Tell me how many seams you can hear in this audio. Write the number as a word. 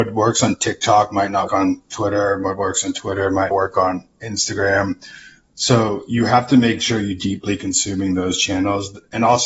two